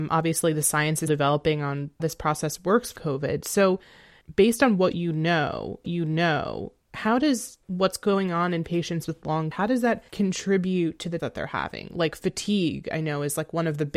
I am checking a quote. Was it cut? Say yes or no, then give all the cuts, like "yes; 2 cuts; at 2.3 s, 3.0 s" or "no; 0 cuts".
yes; 8 cuts; at 1.1 s, 2.0 s, 3.0 s, 5.8 s, 7.6 s, 9.5 s, 10.1 s, 11.2 s